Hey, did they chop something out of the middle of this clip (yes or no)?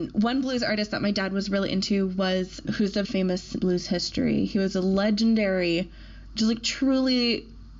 yes